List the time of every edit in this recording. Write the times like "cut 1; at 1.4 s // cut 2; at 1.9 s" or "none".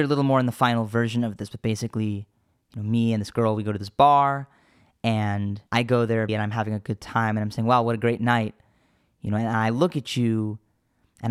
cut 1; at 5.7 s // cut 2; at 6.3 s